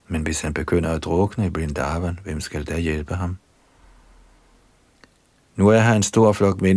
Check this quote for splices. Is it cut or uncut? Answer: uncut